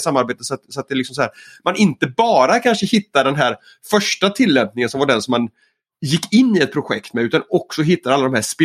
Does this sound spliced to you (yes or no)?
no